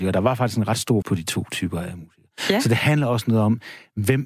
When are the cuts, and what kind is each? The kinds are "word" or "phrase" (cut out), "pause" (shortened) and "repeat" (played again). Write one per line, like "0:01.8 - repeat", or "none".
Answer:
0:01.0 - word